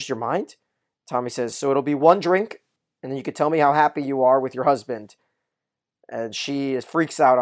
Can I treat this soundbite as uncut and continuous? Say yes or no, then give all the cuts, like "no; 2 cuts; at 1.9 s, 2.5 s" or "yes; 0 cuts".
yes; 0 cuts